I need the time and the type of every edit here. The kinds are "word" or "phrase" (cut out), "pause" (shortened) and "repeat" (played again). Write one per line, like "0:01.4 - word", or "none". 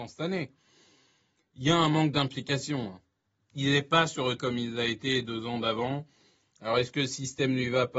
0:04.4 - word

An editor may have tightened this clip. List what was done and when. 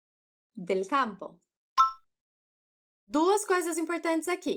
0:02.3 - pause

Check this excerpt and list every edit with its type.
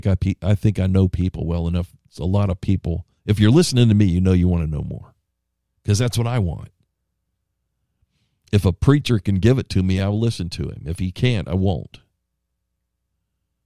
none

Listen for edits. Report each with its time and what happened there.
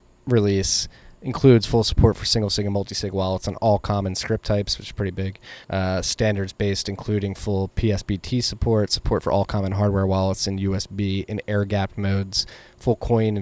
0:05.6 - pause

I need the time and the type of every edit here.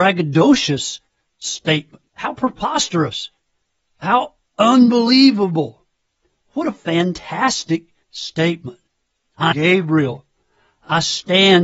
0:02.1 - pause
0:04.4 - pause
0:08.0 - pause
0:09.5 - word

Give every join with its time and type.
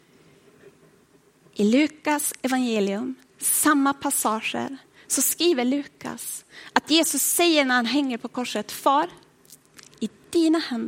none

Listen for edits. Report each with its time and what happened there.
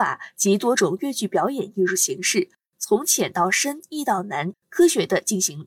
0:04.5 - phrase

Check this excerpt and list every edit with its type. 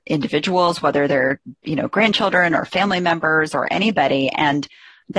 none

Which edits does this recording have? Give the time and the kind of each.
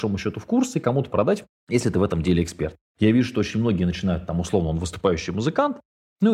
none

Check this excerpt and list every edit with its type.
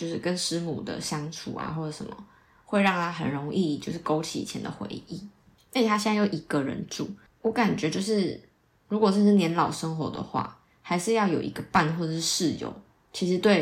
none

